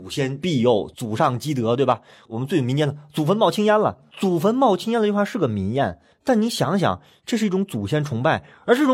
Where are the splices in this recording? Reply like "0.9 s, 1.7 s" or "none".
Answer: none